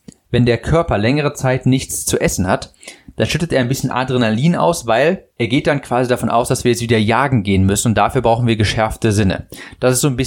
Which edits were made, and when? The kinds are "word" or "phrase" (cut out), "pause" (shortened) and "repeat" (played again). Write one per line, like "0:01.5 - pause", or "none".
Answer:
0:05.3 - pause

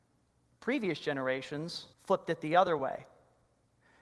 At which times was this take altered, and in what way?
0:01.9 - pause

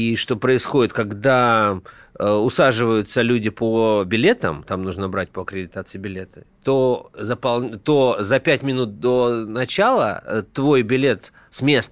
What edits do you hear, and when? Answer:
none

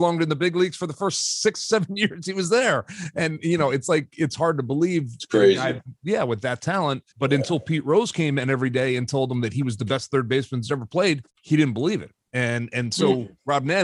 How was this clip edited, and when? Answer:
0:07.1 - pause
0:11.3 - pause

